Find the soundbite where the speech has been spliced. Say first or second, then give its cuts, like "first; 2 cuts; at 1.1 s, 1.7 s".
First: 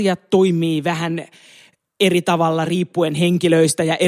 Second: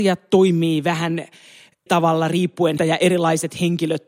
second; 2 cuts; at 1.9 s, 2.8 s